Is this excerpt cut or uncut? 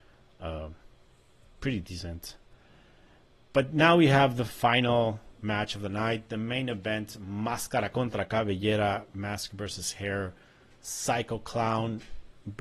uncut